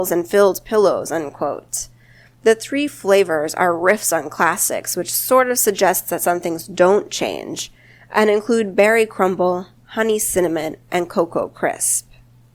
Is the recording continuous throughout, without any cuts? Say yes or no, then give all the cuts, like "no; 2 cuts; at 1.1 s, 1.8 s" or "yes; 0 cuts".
yes; 0 cuts